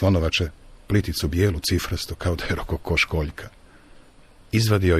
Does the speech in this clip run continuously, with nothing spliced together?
yes; 0 cuts

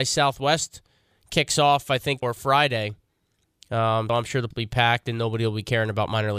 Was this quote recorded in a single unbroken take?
no; 4 cuts; at 1.1 s, 2.2 s, 4.1 s, 4.5 s

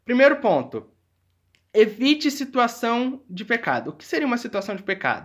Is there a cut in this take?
no; 0 cuts

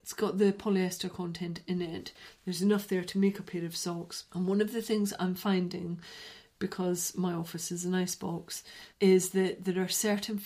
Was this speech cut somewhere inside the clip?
yes; 2 cuts; at 4.3 s, 8.9 s

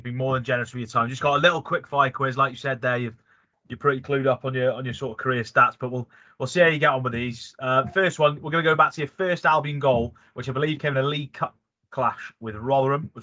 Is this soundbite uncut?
yes; 0 cuts

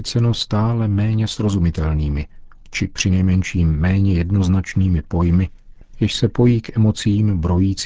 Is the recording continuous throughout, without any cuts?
yes; 0 cuts

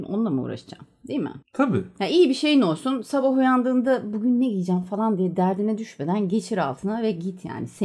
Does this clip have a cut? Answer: yes; 1 cut; at 1.4 s

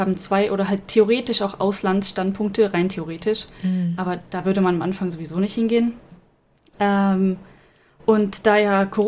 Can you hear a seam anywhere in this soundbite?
no; 0 cuts

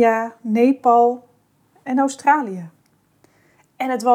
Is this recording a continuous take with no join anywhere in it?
yes; 0 cuts

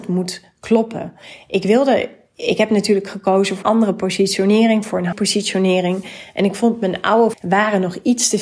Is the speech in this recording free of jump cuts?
no; 3 cuts; at 3.6 s, 5.1 s, 7.3 s

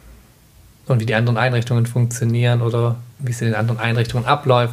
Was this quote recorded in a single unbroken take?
no; 1 cut; at 3.1 s

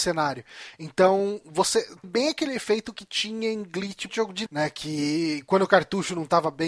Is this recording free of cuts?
no; 3 cuts; at 2.0 s, 4.1 s, 4.5 s

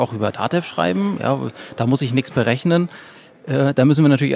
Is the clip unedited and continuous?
yes; 0 cuts

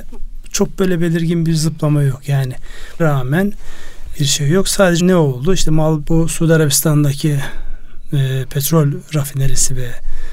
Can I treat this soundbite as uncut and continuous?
no; 4 cuts; at 3.0 s, 4.1 s, 5.0 s, 6.0 s

